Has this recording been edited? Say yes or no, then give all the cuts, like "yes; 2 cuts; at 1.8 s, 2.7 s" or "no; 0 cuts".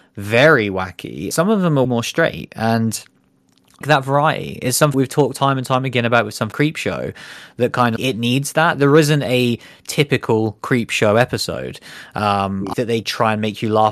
yes; 8 cuts; at 1.3 s, 1.8 s, 3.8 s, 4.9 s, 6.5 s, 8.0 s, 12.7 s, 13.0 s